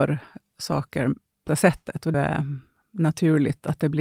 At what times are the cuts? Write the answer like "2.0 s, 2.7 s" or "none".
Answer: 1.5 s, 2.1 s